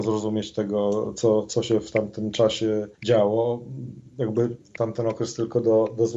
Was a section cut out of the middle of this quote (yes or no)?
yes